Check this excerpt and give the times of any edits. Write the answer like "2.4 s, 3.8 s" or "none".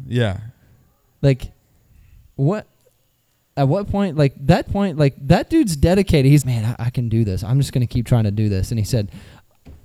4.7 s, 6.4 s